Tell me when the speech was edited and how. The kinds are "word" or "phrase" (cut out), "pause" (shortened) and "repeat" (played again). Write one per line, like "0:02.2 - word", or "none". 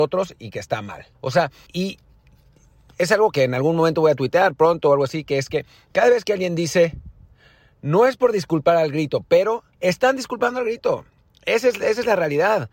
0:01.1 - pause
0:01.7 - word
0:03.3 - word
0:09.7 - pause